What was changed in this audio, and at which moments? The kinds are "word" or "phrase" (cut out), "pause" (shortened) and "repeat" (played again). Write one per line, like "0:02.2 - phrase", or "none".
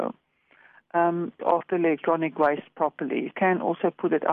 0:01.4 - word
0:03.3 - phrase